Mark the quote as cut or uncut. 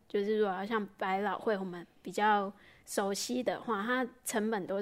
uncut